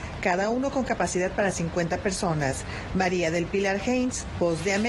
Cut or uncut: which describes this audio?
uncut